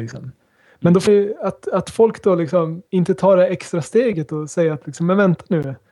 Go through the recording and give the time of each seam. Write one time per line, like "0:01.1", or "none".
0:01.1
0:02.9